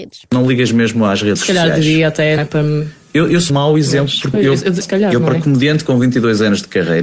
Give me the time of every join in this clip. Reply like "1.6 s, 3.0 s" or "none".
2.4 s, 3.5 s, 4.3 s, 4.8 s